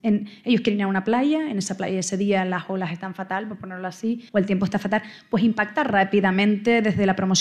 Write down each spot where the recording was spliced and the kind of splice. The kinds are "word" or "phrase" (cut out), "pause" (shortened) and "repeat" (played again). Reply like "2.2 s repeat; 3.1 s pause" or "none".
4.3 s pause